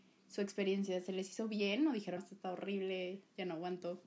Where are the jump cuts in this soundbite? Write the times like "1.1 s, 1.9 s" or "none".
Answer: 2.2 s